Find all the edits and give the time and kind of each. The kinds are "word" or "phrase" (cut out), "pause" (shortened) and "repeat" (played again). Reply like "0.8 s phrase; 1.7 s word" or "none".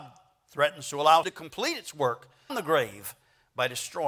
1.2 s word; 2.5 s word